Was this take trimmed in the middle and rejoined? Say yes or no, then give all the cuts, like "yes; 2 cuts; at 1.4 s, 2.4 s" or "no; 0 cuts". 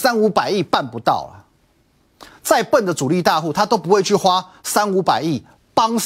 no; 0 cuts